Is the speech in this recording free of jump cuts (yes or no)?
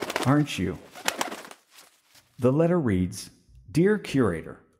yes